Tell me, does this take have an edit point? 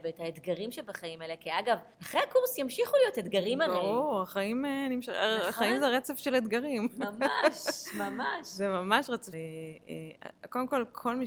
yes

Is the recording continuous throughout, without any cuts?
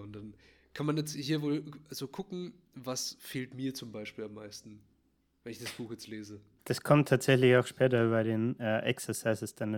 yes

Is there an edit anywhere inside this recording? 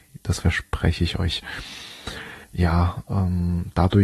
yes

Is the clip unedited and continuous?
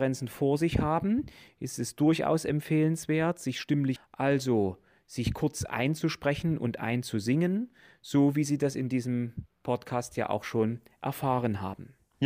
no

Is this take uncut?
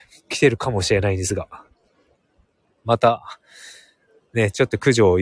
yes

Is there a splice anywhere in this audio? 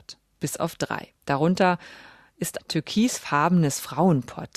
yes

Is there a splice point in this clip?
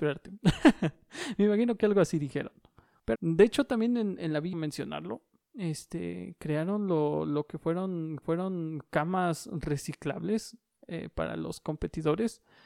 yes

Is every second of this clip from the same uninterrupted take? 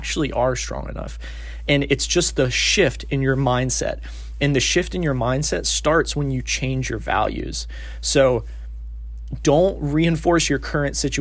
yes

